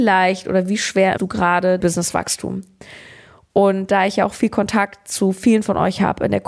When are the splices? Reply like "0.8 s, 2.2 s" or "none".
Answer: 1.2 s, 1.8 s